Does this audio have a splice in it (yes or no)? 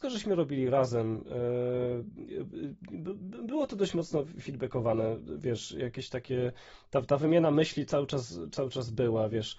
no